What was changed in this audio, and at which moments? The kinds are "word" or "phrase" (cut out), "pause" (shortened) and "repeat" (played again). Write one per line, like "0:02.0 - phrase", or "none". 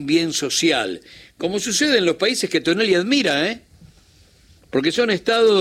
none

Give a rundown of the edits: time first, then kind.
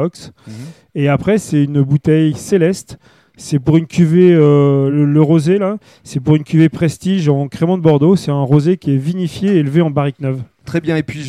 none

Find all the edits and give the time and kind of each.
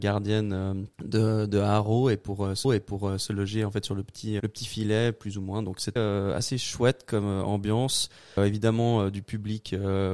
0:00.9 - pause
0:02.6 - repeat
0:04.4 - word
0:06.0 - word
0:08.4 - word

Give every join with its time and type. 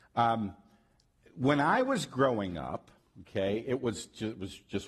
0:03.0 - pause

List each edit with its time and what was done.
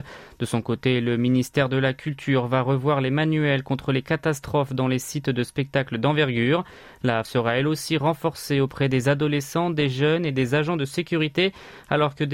0:07.2 - phrase

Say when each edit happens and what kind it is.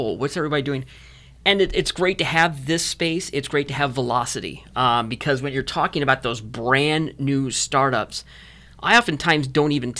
none

